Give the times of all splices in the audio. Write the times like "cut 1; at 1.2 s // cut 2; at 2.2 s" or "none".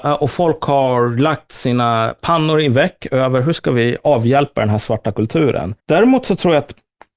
cut 1; at 5.8 s

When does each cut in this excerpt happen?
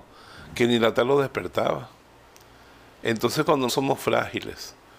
cut 1; at 1.0 s // cut 2; at 3.7 s

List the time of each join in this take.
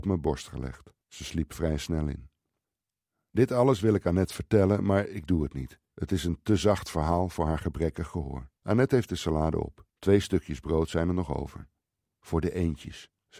cut 1; at 1.0 s // cut 2; at 2.6 s // cut 3; at 5.8 s // cut 4; at 8.6 s // cut 5; at 9.9 s

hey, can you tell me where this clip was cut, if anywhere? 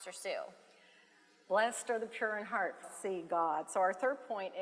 cut 1; at 2.8 s

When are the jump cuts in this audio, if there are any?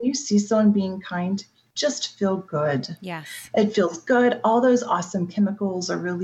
none

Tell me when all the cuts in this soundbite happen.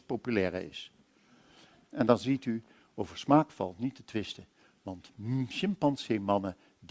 none

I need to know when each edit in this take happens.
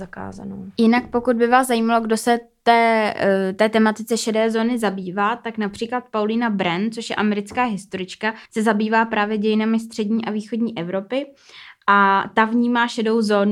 cut 1; at 8.4 s

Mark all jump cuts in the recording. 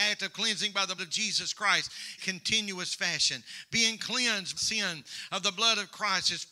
cut 1; at 1.0 s // cut 2; at 2.2 s // cut 3; at 4.6 s

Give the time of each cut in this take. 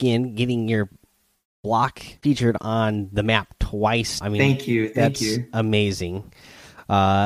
cut 1; at 2.2 s // cut 2; at 4.2 s

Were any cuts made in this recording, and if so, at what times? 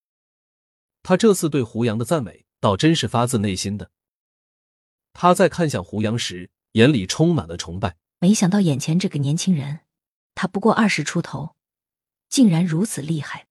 cut 1; at 2.5 s // cut 2; at 8.1 s

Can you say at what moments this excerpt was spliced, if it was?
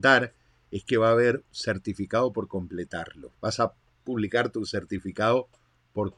cut 1; at 1.5 s // cut 2; at 3.9 s

